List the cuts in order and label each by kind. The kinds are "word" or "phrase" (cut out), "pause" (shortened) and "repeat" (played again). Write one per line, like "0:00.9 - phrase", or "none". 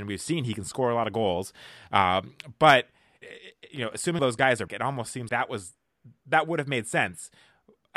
0:03.2 - word
0:04.2 - word
0:04.7 - word
0:05.3 - word